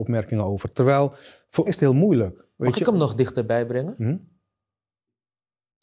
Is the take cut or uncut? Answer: cut